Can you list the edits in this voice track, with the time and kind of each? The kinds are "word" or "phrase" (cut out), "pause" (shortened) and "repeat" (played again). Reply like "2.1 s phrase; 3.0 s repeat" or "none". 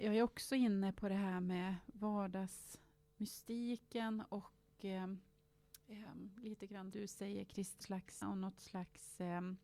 6.9 s word; 7.8 s word; 8.2 s word